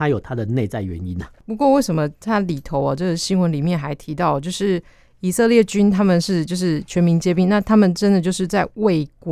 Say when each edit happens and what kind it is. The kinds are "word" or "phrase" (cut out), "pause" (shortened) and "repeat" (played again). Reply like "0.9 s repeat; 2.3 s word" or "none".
1.4 s pause